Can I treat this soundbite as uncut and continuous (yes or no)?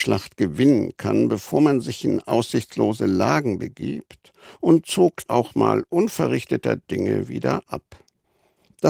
no